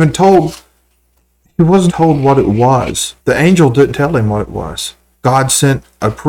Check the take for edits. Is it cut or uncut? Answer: cut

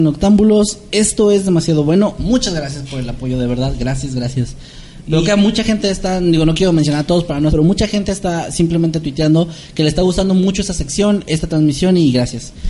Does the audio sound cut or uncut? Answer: cut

